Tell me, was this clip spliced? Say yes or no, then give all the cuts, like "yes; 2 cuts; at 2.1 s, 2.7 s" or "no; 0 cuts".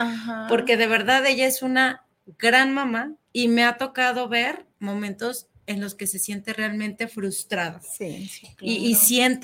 yes; 2 cuts; at 3.2 s, 4.7 s